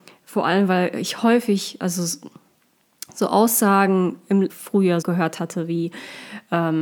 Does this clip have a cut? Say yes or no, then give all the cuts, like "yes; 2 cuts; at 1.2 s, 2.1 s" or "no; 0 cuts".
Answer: yes; 2 cuts; at 4.5 s, 5.0 s